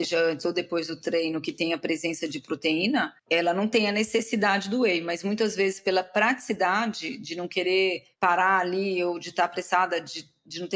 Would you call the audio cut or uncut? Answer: cut